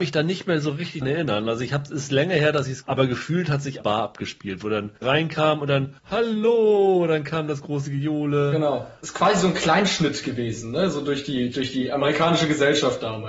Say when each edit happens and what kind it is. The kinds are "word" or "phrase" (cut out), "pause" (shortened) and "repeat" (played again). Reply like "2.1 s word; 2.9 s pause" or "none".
1.0 s word; 2.8 s phrase; 3.8 s phrase; 5.0 s word; 6.0 s pause; 11.5 s word